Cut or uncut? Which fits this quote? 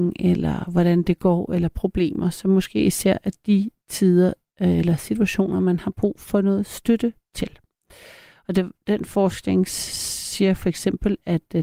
uncut